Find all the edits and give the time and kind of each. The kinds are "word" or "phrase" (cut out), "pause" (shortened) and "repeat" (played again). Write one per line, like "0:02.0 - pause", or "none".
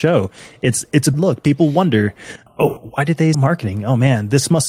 0:01.1 - word
0:02.5 - word
0:03.3 - word